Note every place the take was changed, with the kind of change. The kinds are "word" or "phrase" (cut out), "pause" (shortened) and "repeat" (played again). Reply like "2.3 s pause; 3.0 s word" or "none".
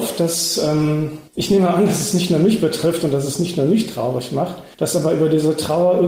1.3 s pause; 4.7 s pause